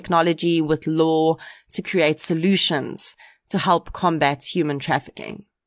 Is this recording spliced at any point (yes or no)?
no